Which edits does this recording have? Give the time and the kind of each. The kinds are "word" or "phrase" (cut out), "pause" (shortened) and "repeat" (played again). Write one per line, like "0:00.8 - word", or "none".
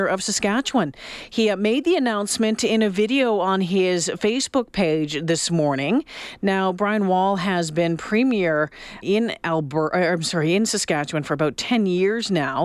0:09.0 - word